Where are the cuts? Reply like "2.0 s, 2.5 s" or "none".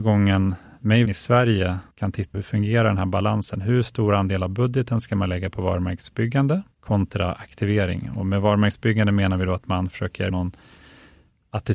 1.1 s, 1.9 s, 2.3 s, 6.7 s, 10.3 s